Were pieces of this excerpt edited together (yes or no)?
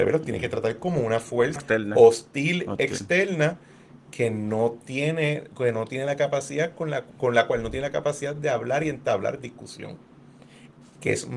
yes